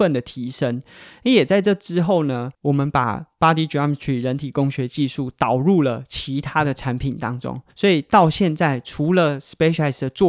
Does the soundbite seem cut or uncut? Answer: cut